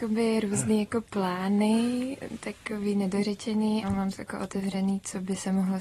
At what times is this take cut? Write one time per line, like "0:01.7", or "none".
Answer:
0:03.8
0:04.2